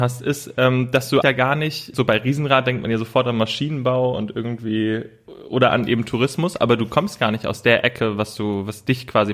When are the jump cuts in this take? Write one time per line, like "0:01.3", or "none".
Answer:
0:01.2
0:01.9

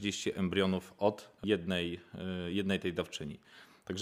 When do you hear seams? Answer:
none

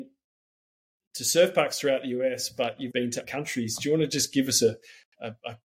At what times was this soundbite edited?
0:02.9
0:03.2

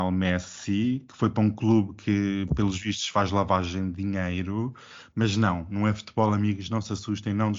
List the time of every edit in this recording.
none

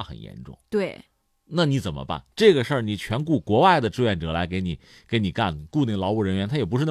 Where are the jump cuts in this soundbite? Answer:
none

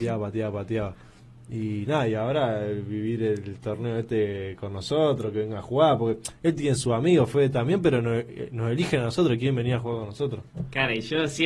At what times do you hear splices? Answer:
none

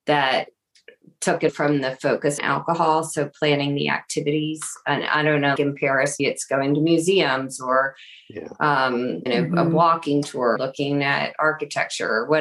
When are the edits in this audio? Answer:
0:01.5
0:02.4
0:05.6
0:06.2
0:09.3
0:10.6

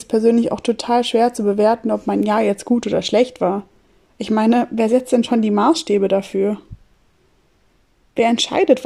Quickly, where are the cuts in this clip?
none

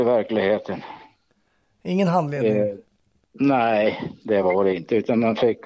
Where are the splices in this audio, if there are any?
none

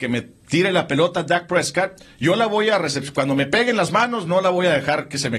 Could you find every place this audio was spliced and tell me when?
none

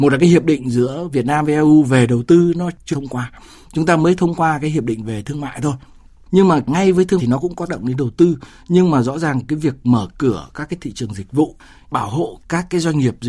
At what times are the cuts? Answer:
0:02.9
0:07.2
0:07.7

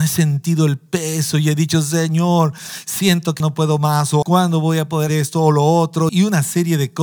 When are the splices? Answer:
0:03.4
0:04.2
0:05.1
0:06.1

